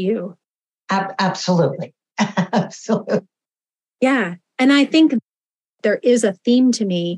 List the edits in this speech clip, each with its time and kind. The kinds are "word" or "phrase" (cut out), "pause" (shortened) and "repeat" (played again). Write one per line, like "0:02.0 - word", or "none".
none